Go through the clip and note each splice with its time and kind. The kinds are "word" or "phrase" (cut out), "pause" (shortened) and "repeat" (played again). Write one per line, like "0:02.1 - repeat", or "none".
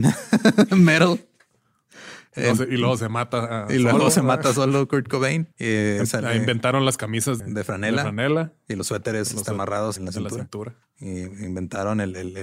0:05.5 - pause
0:07.4 - word
0:10.0 - word
0:10.8 - pause